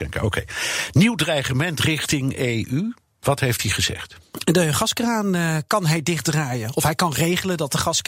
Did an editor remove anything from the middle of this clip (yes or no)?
no